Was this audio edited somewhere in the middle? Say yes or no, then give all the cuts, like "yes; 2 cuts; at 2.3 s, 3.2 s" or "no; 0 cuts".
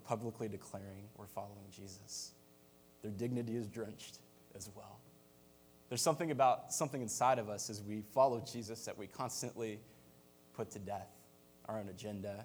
yes; 1 cut; at 1.1 s